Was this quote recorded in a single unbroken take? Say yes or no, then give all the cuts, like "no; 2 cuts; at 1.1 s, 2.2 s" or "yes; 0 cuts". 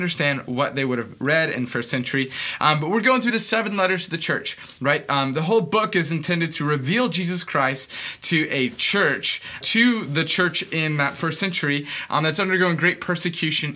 no; 1 cut; at 9.6 s